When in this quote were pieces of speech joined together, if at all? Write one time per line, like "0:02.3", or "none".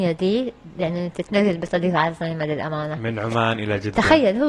none